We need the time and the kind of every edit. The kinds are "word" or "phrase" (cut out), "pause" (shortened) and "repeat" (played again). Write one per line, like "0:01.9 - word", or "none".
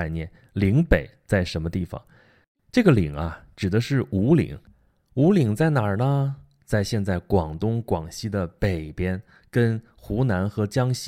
none